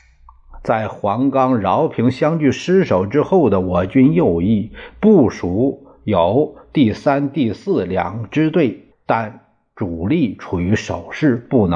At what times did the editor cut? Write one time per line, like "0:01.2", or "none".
0:08.9

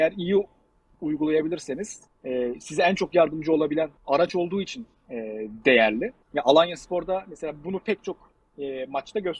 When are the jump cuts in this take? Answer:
0:02.1
0:04.0
0:06.2

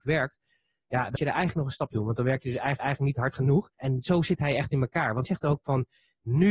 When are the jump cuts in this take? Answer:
0:01.2
0:01.9
0:02.8
0:03.7
0:05.3

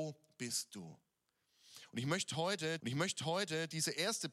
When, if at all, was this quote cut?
0:02.8

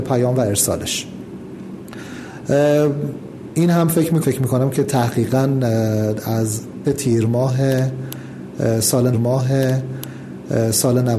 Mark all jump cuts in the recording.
0:04.2
0:06.8
0:09.1

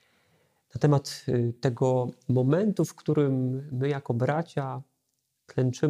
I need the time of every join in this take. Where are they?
none

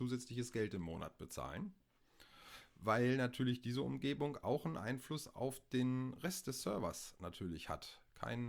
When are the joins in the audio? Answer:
none

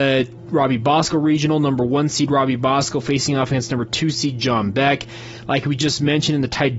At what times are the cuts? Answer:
none

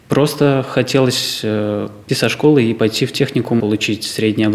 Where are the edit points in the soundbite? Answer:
0:02.1
0:03.6

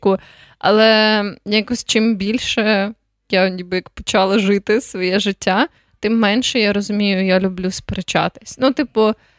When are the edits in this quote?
none

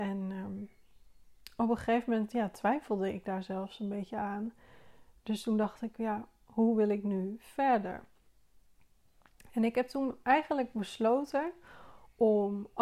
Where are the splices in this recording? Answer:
none

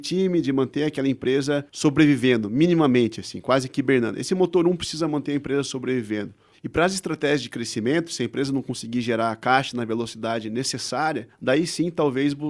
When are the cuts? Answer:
none

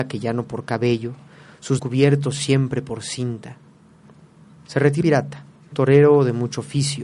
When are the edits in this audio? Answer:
0:01.8
0:05.0
0:05.7

